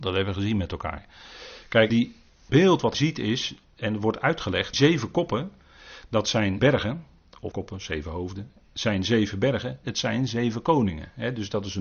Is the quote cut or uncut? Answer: cut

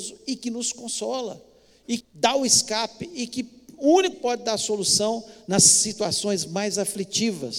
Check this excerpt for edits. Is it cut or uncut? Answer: cut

